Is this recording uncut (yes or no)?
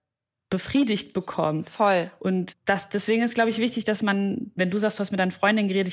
no